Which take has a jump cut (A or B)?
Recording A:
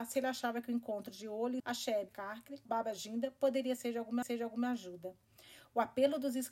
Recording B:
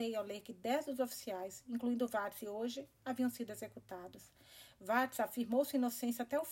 A